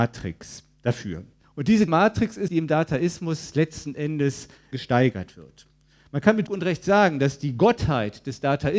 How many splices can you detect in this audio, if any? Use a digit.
5